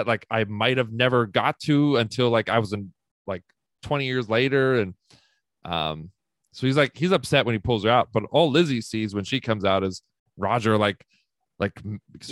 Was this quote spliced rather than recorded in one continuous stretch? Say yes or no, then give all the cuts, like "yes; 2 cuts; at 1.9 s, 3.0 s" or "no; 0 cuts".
no; 0 cuts